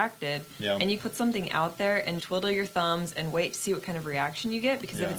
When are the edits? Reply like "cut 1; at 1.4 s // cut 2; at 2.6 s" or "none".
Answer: cut 1; at 1.0 s // cut 2; at 2.2 s